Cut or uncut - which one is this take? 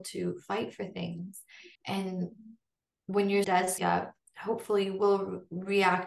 cut